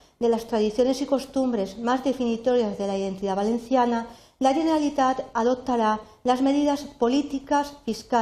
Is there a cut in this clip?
no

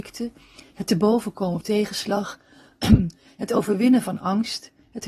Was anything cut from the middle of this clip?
yes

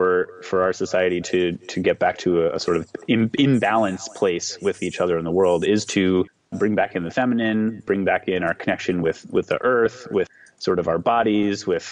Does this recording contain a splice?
no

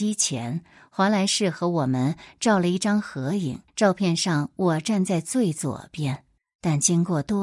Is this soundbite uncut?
no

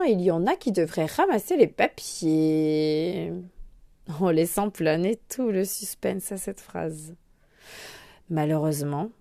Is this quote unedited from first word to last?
yes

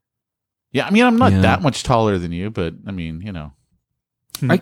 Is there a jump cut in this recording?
no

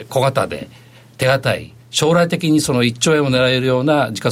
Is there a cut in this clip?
yes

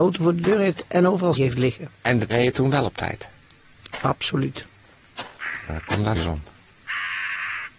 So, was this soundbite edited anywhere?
yes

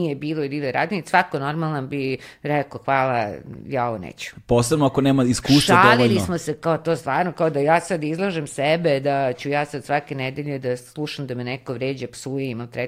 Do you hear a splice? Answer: no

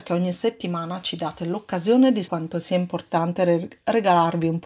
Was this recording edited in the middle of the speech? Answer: yes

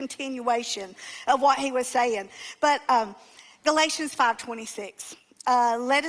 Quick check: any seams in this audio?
no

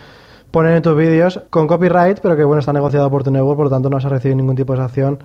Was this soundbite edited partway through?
yes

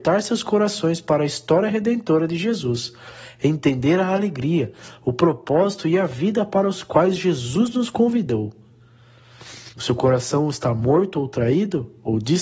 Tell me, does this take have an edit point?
yes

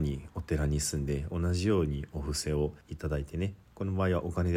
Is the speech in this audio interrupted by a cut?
yes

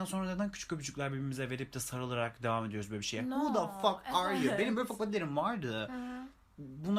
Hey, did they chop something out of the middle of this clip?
no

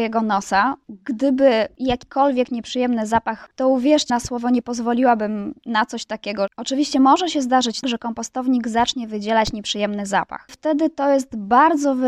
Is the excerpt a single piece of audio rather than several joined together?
no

